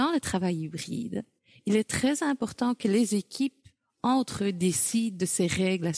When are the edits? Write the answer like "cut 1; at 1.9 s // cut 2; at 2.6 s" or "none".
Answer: none